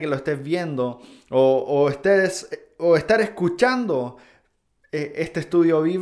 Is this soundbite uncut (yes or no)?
yes